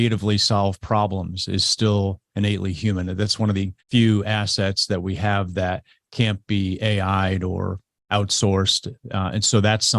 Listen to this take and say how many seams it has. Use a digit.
1